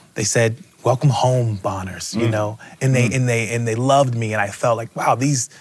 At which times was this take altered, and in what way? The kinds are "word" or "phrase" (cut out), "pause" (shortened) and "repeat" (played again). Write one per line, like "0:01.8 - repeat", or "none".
none